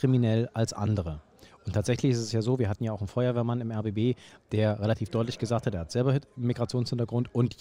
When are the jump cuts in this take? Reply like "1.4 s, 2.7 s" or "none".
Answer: none